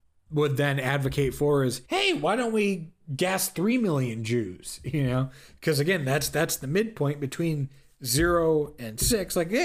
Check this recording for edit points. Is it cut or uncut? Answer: cut